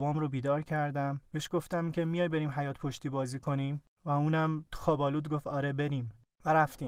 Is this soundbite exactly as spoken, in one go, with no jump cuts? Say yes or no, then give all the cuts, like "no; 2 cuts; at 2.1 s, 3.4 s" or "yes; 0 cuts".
yes; 0 cuts